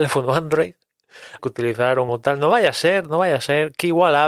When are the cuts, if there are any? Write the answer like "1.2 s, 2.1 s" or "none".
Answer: 1.4 s, 2.1 s